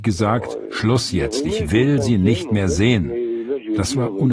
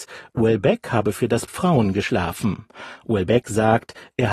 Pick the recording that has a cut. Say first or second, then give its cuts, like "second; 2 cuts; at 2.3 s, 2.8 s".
second; 1 cut; at 1.5 s